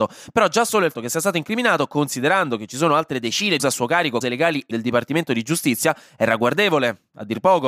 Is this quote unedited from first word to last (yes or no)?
no